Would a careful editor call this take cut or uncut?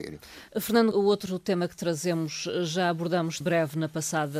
cut